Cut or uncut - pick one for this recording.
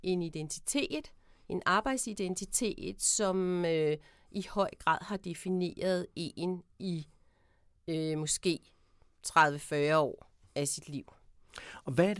uncut